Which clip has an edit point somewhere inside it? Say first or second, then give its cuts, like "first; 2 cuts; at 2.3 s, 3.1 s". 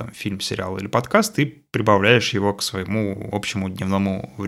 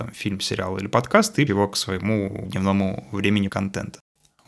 second; 3 cuts; at 1.5 s, 2.4 s, 3.5 s